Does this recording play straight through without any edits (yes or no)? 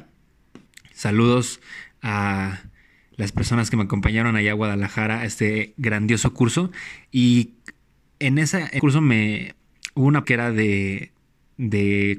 no